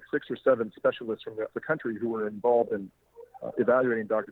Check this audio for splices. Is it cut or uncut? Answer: cut